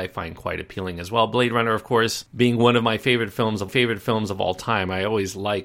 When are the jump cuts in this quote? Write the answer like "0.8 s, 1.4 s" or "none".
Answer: 3.7 s